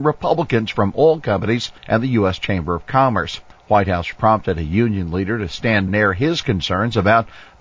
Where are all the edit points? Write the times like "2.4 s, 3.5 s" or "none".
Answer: 1.8 s, 3.5 s, 4.1 s, 5.9 s

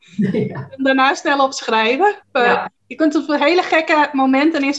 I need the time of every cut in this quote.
2.2 s, 2.8 s

